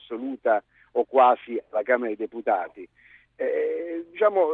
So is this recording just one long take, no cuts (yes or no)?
yes